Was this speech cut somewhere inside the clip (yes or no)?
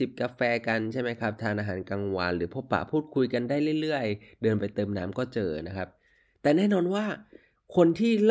no